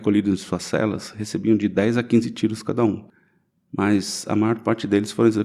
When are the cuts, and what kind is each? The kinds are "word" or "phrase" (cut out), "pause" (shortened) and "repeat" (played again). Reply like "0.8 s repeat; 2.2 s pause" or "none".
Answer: none